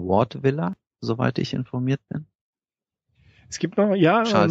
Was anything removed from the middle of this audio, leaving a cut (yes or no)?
no